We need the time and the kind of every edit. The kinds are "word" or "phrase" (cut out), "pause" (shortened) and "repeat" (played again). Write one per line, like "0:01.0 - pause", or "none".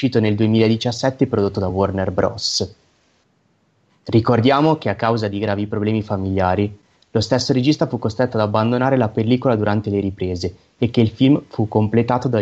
none